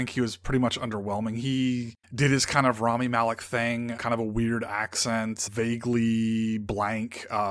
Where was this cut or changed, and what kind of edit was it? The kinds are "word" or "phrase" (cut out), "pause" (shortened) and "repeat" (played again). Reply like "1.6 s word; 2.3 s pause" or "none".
2.0 s pause; 4.0 s word; 5.5 s word